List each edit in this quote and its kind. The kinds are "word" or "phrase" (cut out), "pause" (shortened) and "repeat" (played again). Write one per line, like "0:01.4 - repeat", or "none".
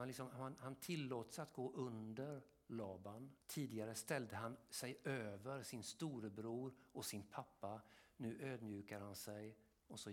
0:03.4 - pause